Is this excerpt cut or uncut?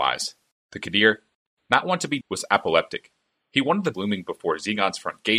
cut